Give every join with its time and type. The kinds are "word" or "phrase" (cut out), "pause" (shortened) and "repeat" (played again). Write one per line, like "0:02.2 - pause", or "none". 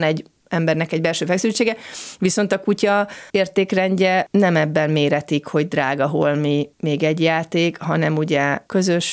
0:03.3 - pause